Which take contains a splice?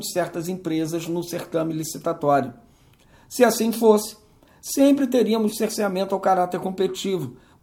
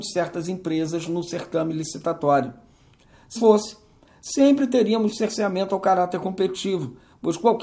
second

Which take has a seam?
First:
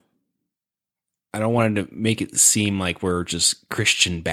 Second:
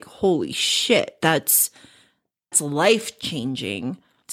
second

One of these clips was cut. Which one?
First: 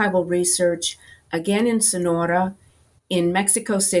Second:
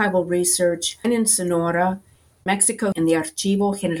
second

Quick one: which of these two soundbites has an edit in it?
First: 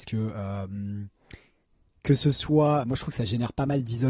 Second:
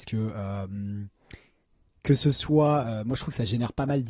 first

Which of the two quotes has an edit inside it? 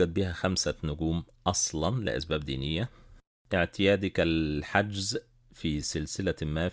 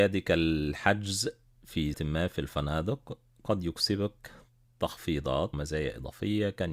second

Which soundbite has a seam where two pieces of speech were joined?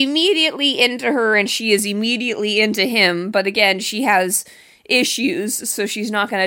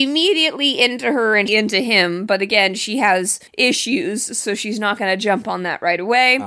second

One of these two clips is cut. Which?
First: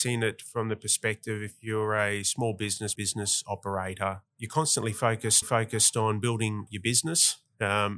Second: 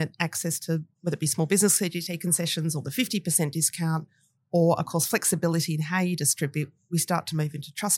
first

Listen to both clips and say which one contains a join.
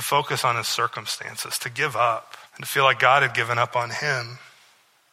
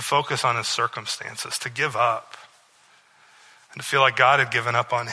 first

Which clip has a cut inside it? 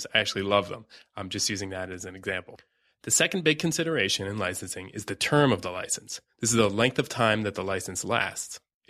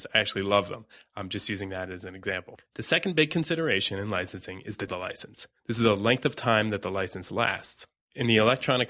second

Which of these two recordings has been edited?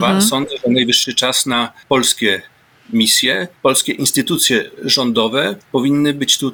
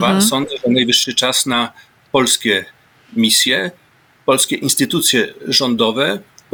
first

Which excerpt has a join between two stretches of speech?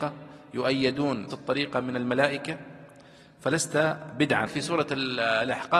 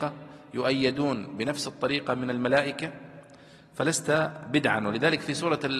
first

